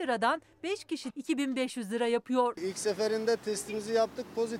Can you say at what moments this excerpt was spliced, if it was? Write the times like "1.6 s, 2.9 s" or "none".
1.1 s